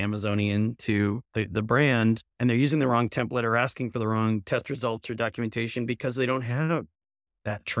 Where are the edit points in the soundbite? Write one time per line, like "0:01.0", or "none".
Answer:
0:01.2
0:02.3